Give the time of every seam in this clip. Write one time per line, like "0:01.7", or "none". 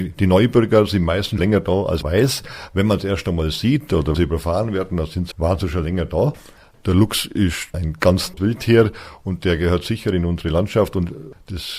0:01.4
0:02.0
0:04.1
0:05.3
0:07.7
0:08.4